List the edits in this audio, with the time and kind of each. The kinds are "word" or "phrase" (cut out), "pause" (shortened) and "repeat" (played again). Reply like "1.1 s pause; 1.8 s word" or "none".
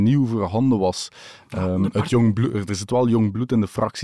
none